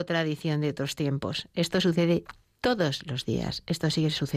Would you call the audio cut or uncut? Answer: uncut